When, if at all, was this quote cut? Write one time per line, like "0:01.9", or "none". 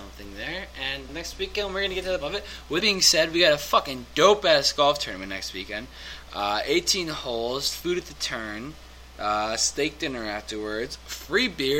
0:01.1
0:02.2
0:02.8